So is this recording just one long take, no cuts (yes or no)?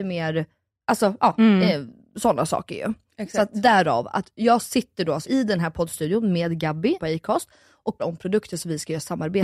no